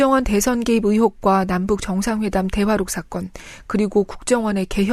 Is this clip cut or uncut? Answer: uncut